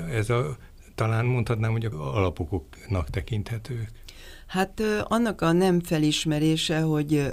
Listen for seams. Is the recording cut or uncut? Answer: cut